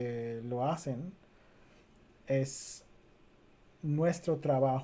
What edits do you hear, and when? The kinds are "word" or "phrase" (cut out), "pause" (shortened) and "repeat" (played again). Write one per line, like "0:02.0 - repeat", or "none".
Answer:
none